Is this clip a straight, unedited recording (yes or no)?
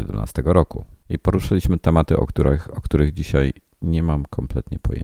yes